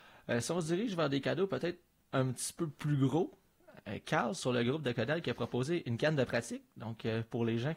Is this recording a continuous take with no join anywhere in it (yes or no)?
yes